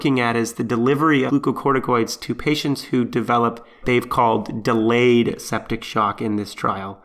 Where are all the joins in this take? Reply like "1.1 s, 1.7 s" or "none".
1.3 s, 3.8 s